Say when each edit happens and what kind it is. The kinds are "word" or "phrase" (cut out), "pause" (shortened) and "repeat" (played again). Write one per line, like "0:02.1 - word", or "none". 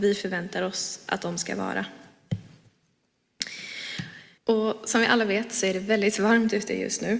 0:04.4 - pause